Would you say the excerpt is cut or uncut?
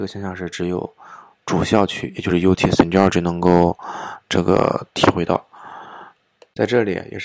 uncut